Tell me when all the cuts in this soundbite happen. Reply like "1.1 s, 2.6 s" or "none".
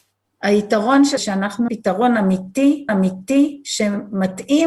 1.2 s, 1.7 s, 2.9 s